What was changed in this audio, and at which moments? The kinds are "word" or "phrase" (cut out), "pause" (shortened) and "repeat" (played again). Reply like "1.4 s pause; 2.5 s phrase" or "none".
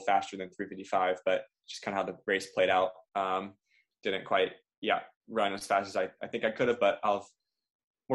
none